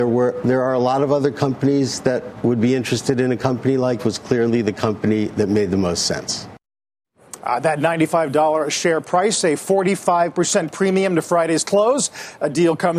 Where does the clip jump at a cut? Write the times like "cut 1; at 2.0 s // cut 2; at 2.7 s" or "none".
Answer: cut 1; at 4.0 s